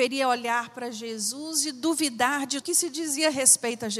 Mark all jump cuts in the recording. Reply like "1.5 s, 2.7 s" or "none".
2.6 s